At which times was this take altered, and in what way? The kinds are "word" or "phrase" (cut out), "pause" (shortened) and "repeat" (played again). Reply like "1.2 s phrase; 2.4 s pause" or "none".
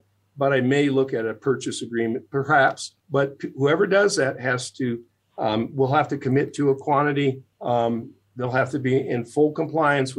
3.0 s pause; 7.5 s pause